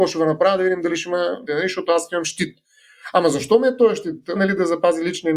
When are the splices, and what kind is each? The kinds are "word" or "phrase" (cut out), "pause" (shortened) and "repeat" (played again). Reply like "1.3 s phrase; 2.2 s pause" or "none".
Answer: 1.5 s word; 4.4 s word